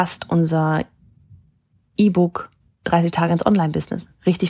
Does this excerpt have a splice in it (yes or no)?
no